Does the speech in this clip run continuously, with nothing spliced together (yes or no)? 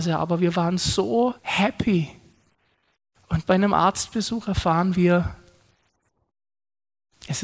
no